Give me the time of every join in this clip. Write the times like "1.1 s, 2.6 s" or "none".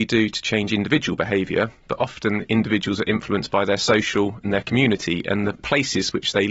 4.4 s, 5.6 s